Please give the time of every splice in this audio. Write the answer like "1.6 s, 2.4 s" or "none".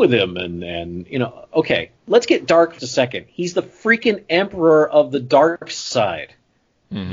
2.0 s, 2.8 s